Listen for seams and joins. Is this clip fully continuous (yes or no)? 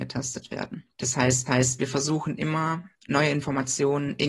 no